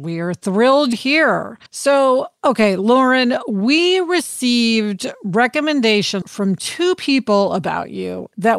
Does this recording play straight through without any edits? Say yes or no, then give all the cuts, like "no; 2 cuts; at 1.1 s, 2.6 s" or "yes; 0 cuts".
no; 3 cuts; at 0.9 s, 1.7 s, 6.2 s